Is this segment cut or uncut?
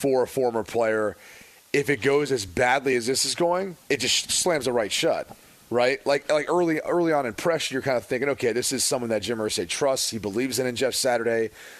uncut